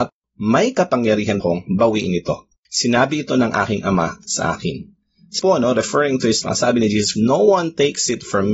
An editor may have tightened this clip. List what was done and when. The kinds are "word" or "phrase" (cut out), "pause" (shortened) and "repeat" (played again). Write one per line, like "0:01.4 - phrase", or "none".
0:01.4 - word
0:02.6 - pause
0:05.4 - word
0:06.4 - word
0:07.1 - word

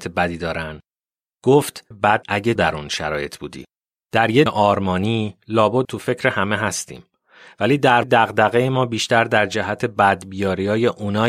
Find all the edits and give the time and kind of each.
0:01.9 - phrase
0:02.2 - word
0:02.6 - word
0:04.0 - pause
0:04.5 - word
0:05.8 - phrase
0:08.0 - word

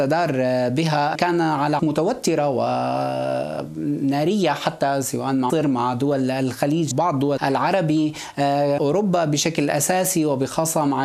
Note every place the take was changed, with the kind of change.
0:01.1 - phrase
0:01.8 - word
0:05.5 - word
0:06.9 - word
0:07.4 - word
0:08.8 - word

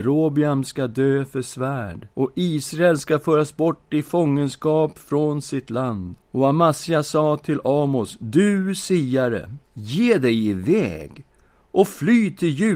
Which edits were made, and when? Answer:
0:02.1 - pause
0:06.2 - pause
0:09.6 - pause

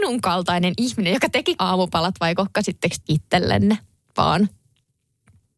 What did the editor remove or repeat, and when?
0:01.6 - word
0:03.0 - word

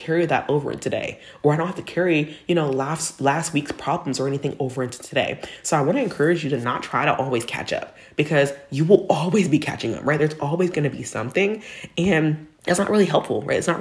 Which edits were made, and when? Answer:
0:12.5 - pause

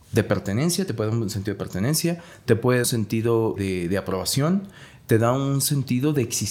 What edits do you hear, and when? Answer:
0:02.8 - phrase
0:03.6 - word

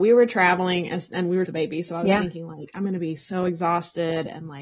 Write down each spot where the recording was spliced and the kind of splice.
0:01.5 - phrase

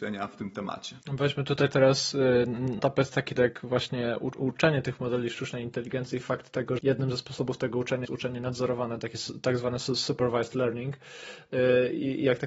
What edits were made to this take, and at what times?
0:01.0 - pause
0:02.8 - word
0:03.4 - word
0:06.8 - word
0:08.0 - word

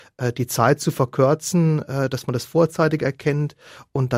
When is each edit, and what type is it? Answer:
none

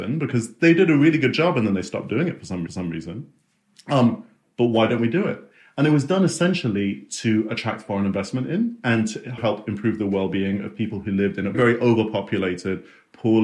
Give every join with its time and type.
0:02.7 - repeat
0:09.4 - word
0:11.5 - word

